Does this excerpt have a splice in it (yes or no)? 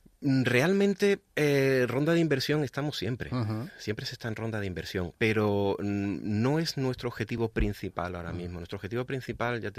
yes